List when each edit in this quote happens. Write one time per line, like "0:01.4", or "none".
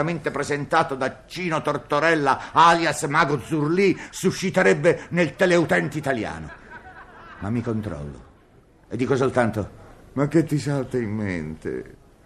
none